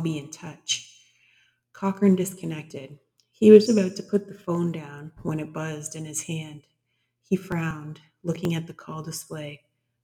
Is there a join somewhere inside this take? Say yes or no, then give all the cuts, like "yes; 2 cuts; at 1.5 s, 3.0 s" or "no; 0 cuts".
yes; 1 cut; at 3.7 s